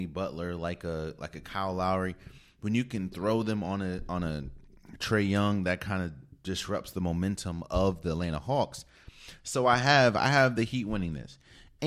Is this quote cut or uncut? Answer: uncut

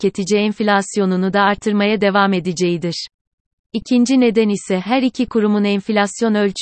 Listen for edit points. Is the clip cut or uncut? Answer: uncut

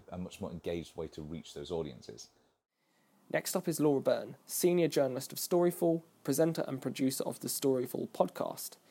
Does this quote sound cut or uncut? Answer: uncut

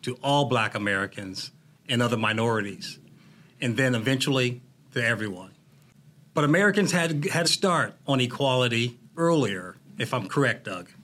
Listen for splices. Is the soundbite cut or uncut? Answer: cut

